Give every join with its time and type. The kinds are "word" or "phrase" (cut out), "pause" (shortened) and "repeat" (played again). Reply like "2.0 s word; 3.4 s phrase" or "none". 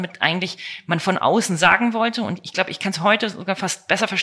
none